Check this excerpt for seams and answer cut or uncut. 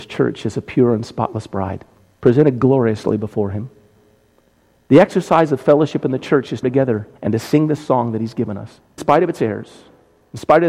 cut